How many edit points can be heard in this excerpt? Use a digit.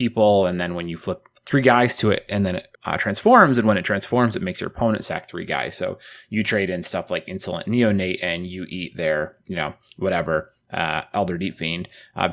1